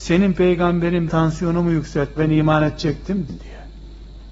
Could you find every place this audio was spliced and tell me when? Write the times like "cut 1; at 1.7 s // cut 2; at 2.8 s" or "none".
cut 1; at 1.1 s // cut 2; at 2.2 s // cut 3; at 3.3 s